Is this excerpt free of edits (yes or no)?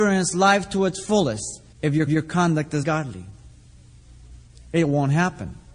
no